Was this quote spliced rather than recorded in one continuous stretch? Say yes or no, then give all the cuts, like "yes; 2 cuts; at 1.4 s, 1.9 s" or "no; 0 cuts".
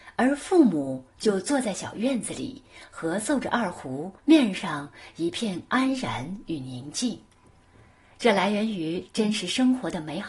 yes; 1 cut; at 4.2 s